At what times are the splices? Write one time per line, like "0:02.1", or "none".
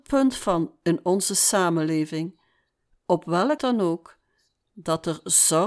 0:03.6